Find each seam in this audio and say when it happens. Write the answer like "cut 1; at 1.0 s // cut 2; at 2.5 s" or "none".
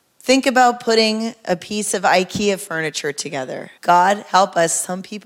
cut 1; at 3.8 s